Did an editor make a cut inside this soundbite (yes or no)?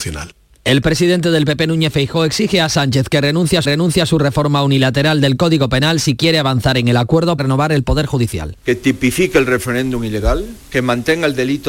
yes